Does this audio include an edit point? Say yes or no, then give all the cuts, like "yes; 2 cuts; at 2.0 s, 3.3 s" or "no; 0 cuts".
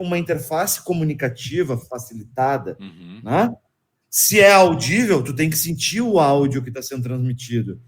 no; 0 cuts